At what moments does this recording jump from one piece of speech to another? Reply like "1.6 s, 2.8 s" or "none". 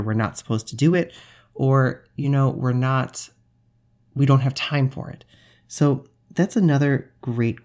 none